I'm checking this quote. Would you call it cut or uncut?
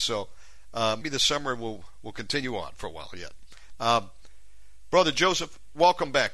cut